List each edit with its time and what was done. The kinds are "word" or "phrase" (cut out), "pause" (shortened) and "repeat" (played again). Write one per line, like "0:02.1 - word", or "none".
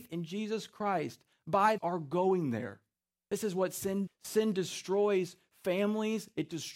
0:01.8 - phrase
0:03.0 - pause
0:04.1 - word